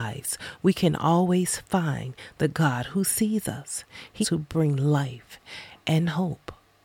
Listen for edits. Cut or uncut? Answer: cut